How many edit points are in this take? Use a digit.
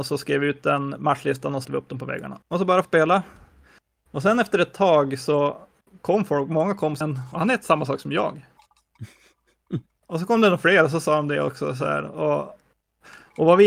4